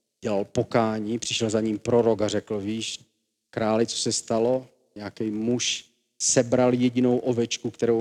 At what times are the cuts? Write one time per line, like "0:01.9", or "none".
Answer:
none